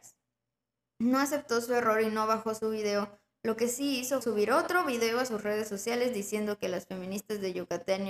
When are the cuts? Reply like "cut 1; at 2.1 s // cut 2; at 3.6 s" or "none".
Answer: cut 1; at 4.2 s